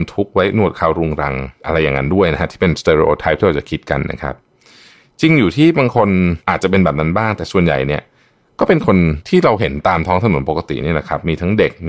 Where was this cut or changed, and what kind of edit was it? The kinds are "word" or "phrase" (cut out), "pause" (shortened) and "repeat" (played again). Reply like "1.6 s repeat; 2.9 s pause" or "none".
none